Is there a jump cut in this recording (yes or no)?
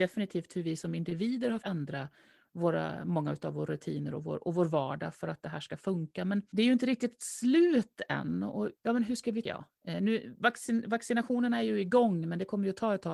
yes